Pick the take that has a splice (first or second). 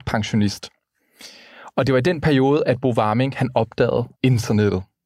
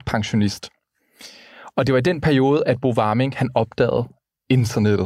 first